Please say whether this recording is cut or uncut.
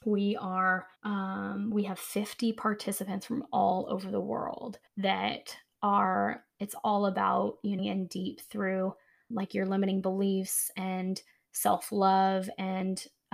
cut